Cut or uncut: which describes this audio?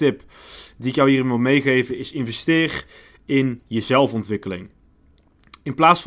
uncut